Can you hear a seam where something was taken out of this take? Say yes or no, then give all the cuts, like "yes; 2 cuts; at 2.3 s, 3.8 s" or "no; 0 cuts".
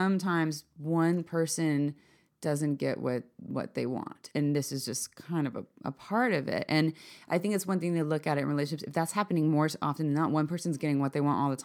no; 0 cuts